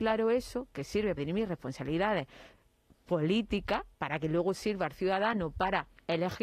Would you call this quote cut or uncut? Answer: cut